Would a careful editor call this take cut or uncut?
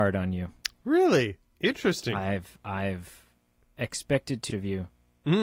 cut